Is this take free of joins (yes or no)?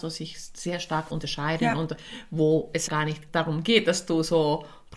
no